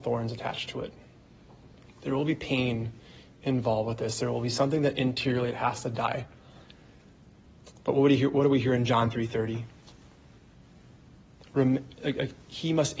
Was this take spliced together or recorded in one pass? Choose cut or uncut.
uncut